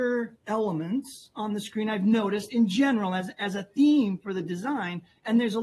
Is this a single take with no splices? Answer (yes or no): yes